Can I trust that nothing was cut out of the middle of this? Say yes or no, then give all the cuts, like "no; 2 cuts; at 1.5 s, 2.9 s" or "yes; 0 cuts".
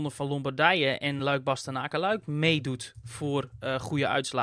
yes; 0 cuts